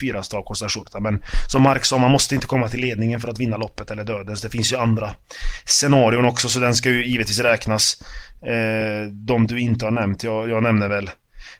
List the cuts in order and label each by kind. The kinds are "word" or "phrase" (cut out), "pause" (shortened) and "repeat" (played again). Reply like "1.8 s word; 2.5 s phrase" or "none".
none

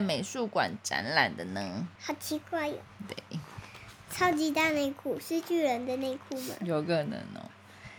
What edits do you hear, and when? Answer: 2.0 s pause

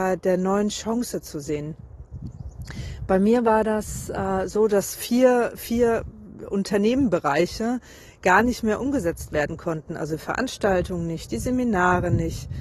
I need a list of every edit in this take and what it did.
none

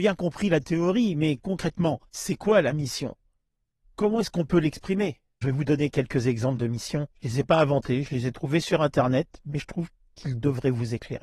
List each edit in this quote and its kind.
2.1 s pause; 5.4 s word; 7.1 s pause

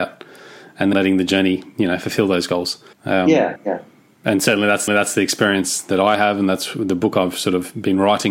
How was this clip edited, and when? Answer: 0.9 s word; 2.9 s pause; 3.6 s word; 4.9 s repeat

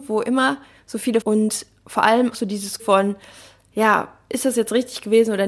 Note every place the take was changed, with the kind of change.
1.2 s word; 2.3 s word; 2.8 s word

